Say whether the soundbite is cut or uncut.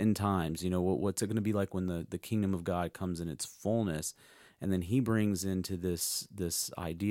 uncut